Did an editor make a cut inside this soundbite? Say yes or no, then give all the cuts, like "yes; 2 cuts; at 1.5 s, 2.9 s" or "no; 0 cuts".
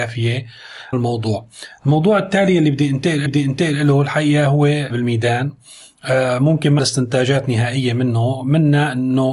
yes; 4 cuts; at 0.9 s, 3.3 s, 4.9 s, 6.8 s